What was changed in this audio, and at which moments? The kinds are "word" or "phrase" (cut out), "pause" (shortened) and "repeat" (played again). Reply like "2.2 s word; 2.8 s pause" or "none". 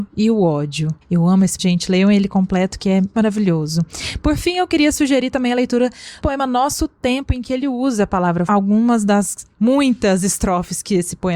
1.0 s pause; 1.6 s word; 3.1 s word; 6.2 s word; 8.5 s phrase